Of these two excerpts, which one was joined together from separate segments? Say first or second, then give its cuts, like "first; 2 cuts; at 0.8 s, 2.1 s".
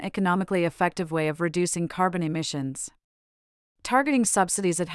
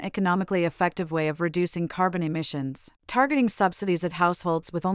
second; 1 cut; at 2.9 s